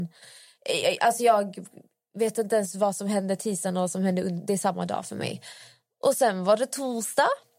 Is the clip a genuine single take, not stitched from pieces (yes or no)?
yes